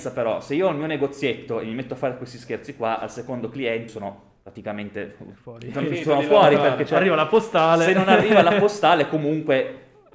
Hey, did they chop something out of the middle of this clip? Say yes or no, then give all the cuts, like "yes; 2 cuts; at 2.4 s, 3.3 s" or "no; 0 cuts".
yes; 1 cut; at 3.9 s